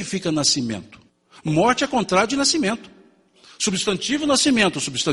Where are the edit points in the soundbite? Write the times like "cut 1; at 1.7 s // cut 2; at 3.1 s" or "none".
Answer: cut 1; at 1.1 s